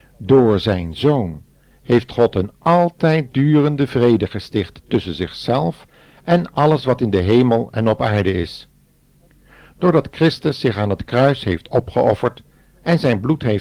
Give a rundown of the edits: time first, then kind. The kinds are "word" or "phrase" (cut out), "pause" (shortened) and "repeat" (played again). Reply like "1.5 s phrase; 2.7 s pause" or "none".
none

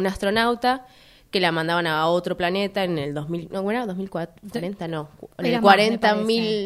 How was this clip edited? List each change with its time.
none

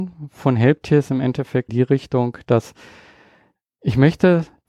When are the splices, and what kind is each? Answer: 1.1 s word; 1.7 s phrase

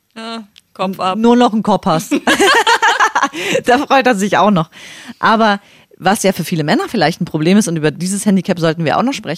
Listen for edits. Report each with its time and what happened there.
none

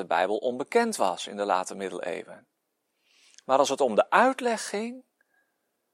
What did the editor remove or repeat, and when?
none

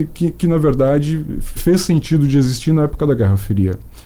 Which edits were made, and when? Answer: 1.6 s word

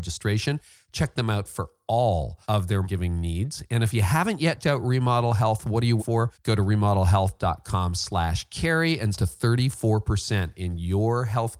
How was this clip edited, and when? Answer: 2.4 s pause; 2.8 s word; 4.6 s word; 6.0 s word; 6.3 s pause; 9.1 s phrase

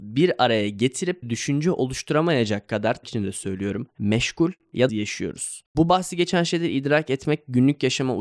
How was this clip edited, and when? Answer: 1.2 s word; 3.0 s word; 4.9 s phrase

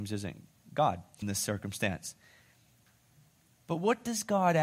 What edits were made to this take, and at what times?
1.2 s phrase

